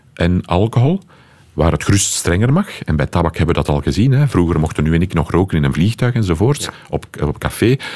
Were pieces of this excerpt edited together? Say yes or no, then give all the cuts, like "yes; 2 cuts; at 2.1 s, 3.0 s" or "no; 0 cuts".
no; 0 cuts